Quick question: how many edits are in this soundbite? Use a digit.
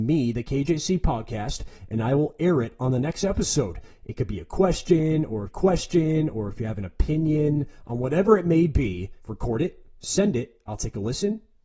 2